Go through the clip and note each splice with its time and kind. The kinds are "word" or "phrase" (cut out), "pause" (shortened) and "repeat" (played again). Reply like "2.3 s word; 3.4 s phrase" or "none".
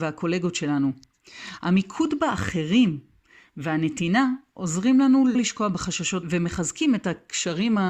5.3 s word; 6.2 s word